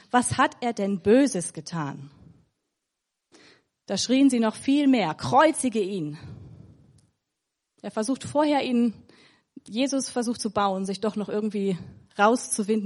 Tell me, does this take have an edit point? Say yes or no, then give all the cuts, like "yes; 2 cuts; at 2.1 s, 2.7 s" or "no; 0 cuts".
yes; 1 cut; at 10.4 s